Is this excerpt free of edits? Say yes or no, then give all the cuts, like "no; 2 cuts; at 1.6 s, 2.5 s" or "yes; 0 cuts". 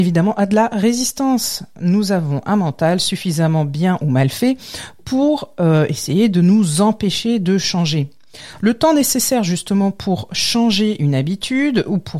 yes; 0 cuts